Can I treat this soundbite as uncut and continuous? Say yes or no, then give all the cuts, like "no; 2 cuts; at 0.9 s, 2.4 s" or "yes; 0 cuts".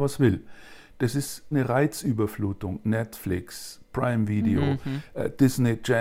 no; 1 cut; at 1.5 s